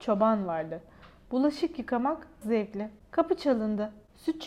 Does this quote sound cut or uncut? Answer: cut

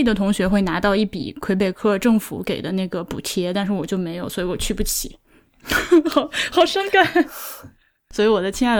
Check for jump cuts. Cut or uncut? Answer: uncut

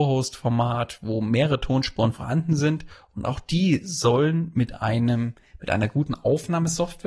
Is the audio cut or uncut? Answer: uncut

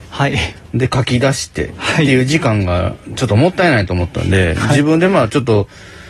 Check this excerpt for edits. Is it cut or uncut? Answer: uncut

